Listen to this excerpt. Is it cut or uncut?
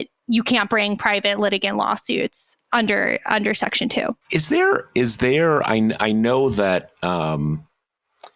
cut